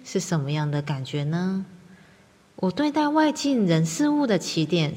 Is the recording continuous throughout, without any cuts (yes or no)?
yes